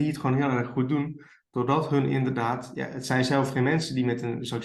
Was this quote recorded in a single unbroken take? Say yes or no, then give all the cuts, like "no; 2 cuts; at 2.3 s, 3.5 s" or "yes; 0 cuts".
yes; 0 cuts